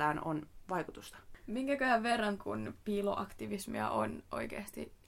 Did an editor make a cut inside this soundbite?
yes; 1 cut; at 2.4 s

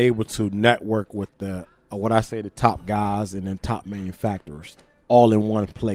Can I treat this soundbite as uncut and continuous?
yes; 0 cuts

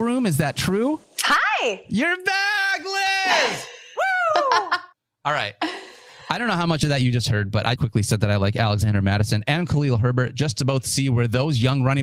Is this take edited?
yes; 2 cuts; at 4.9 s, 7.8 s

